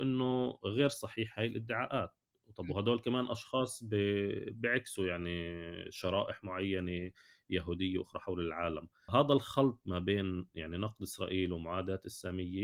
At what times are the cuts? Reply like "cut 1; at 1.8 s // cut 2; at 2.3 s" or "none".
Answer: none